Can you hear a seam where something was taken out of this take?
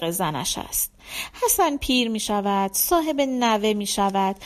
no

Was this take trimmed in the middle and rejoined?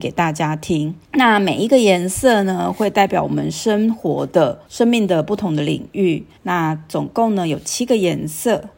yes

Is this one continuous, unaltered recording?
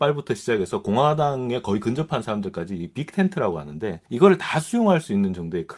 no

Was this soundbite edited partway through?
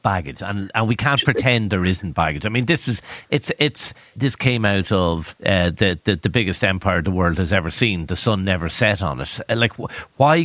yes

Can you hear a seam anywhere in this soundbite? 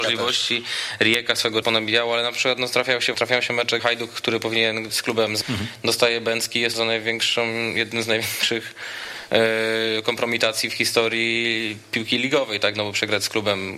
yes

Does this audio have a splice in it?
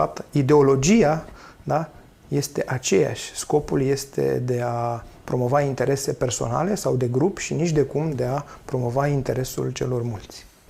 no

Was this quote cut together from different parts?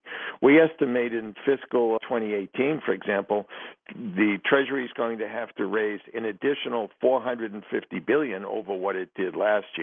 yes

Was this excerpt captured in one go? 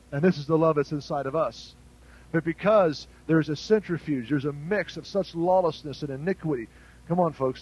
yes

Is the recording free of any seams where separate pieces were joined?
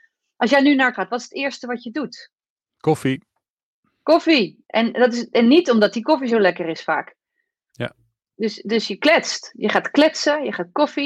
no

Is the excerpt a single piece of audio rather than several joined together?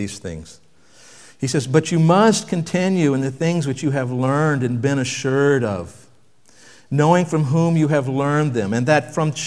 yes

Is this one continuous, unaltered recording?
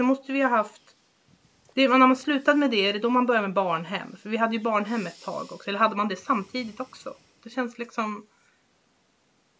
yes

